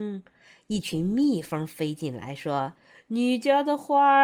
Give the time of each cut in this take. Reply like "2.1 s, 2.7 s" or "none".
2.8 s